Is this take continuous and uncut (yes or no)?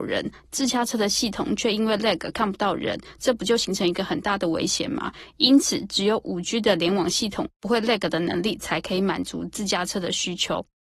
yes